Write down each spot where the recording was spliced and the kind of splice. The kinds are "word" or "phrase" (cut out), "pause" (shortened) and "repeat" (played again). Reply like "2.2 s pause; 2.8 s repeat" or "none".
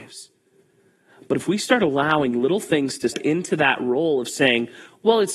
3.1 s word